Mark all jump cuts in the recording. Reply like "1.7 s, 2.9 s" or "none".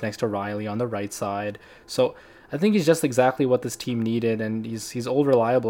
none